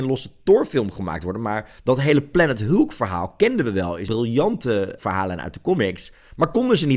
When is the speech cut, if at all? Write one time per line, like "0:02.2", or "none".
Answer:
0:01.8
0:04.1
0:05.0